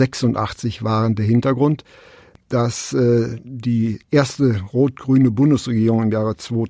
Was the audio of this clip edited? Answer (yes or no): no